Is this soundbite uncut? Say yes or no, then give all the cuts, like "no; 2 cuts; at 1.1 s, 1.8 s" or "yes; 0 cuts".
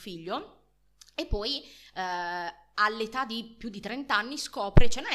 yes; 0 cuts